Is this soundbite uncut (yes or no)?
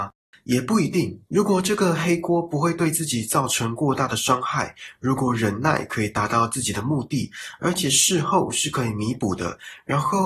no